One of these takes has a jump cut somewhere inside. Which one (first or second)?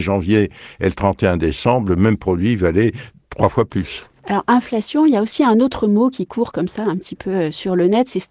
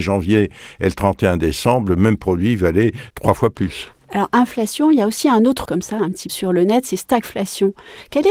second